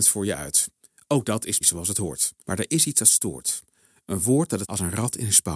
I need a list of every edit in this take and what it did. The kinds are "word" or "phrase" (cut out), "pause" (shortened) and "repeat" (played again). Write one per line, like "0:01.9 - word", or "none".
0:01.6 - word
0:02.4 - pause
0:04.6 - phrase